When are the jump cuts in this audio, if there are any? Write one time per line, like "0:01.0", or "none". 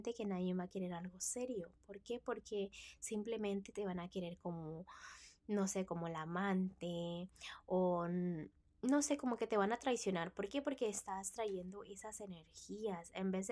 none